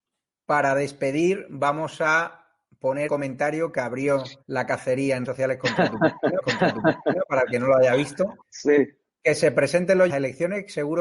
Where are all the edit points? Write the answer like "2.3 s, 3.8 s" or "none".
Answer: 3.1 s, 4.4 s, 5.2 s, 6.4 s, 8.4 s, 10.1 s